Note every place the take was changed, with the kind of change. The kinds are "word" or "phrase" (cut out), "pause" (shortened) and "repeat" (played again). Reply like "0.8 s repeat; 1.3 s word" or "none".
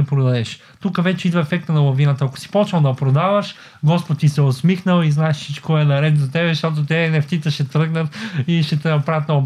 none